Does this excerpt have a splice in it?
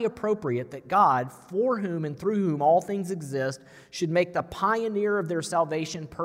no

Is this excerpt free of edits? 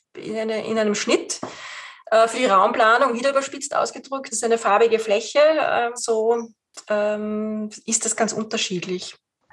no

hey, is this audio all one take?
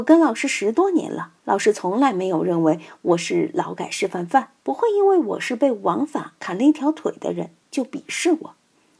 no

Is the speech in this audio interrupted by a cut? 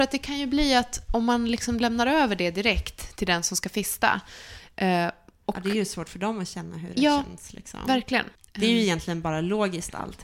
yes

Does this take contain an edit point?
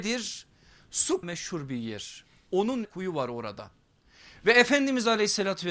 yes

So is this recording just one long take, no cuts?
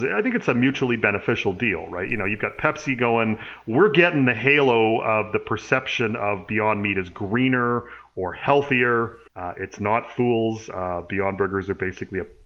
no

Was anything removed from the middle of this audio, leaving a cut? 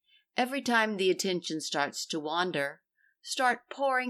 no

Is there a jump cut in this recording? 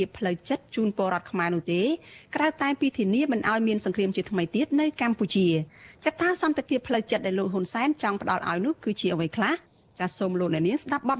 no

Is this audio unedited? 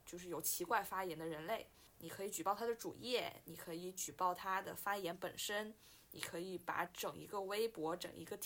yes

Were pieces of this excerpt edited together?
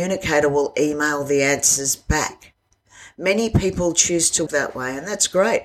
yes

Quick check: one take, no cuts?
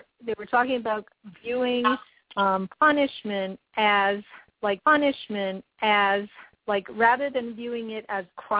no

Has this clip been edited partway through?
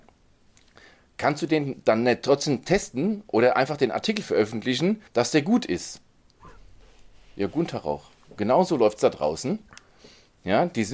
yes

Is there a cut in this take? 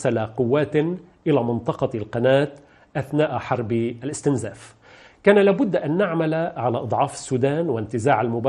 no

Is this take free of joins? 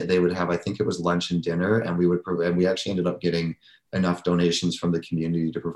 yes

